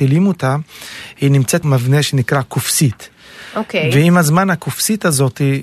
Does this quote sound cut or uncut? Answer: cut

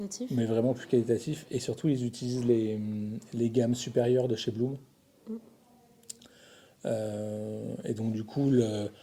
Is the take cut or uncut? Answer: uncut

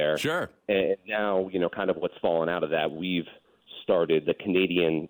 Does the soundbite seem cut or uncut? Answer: uncut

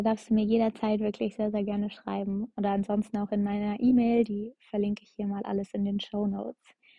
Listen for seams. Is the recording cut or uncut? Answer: uncut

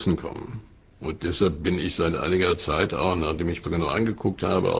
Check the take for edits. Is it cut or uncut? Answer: cut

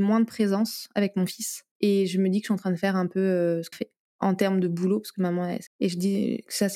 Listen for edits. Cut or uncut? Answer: cut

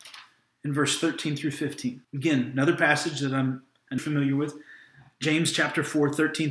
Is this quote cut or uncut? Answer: cut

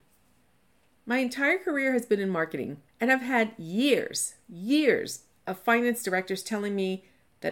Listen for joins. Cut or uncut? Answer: cut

